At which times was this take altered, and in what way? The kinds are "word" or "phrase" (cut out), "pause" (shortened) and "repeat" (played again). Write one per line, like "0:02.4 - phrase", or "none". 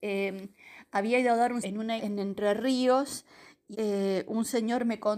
0:01.6 - word
0:02.0 - word
0:03.7 - word